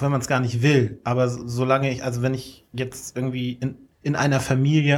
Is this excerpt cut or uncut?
uncut